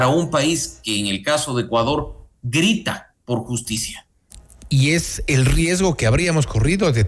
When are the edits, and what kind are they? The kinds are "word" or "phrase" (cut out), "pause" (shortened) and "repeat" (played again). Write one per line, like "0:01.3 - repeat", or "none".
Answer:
0:02.4 - pause